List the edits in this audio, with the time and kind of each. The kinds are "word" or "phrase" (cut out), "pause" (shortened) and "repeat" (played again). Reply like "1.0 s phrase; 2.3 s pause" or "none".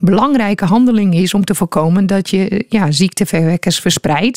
none